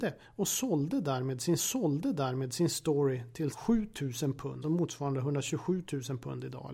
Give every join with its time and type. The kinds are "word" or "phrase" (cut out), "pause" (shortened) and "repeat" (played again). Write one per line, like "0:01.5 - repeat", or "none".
0:01.6 - repeat
0:03.5 - phrase
0:04.6 - word